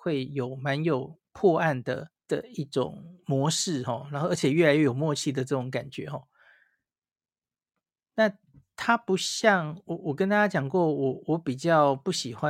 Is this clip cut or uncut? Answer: cut